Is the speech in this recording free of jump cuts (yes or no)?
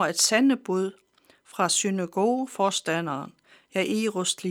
yes